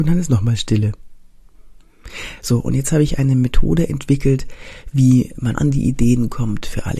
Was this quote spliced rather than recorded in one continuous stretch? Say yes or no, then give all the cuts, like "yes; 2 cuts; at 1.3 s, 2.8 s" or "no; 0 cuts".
yes; 1 cut; at 5.5 s